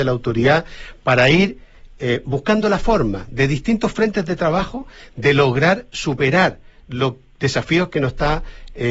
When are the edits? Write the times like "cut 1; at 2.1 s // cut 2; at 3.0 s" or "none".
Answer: none